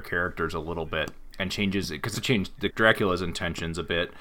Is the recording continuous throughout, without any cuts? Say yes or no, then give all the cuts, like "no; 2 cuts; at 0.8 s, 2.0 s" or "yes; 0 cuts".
no; 2 cuts; at 2.1 s, 2.7 s